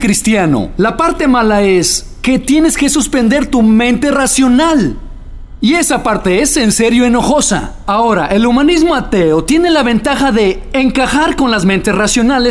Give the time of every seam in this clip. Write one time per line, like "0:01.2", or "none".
none